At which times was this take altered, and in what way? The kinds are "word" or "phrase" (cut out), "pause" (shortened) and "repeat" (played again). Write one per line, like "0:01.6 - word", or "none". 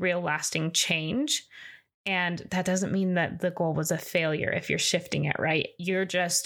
none